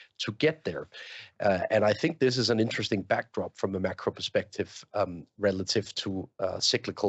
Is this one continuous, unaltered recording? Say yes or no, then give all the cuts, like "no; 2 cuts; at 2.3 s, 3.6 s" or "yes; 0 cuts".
yes; 0 cuts